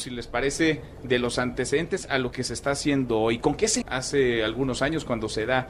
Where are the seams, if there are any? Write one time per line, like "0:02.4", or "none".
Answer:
0:03.8

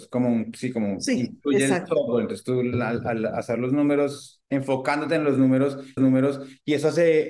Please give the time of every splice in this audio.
0:04.5
0:06.0

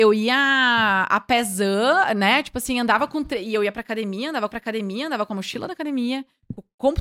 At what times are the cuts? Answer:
0:04.5

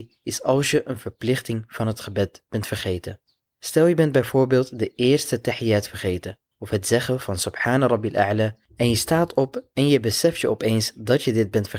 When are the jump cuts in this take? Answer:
0:08.6

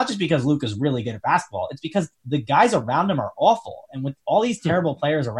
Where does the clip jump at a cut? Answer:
none

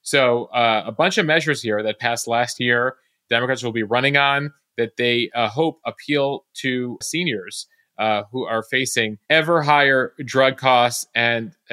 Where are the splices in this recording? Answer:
0:07.0

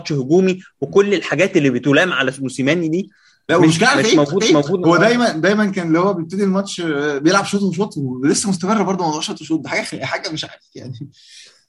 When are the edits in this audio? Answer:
0:04.4

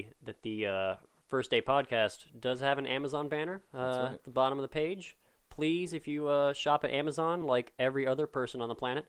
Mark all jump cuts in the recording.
none

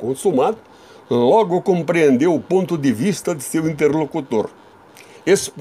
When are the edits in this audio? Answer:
none

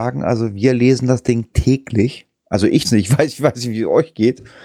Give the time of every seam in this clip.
0:02.8

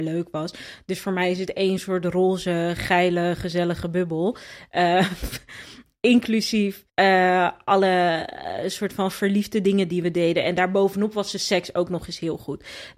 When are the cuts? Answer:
0:06.9

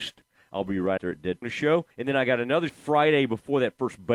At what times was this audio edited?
0:01.0
0:01.4
0:01.9
0:02.7

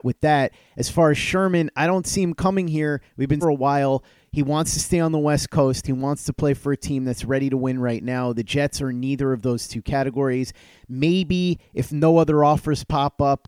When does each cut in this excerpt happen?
0:03.4

